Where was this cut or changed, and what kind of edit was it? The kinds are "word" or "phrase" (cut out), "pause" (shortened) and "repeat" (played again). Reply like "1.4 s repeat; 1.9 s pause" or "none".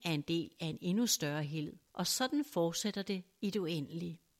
1.9 s pause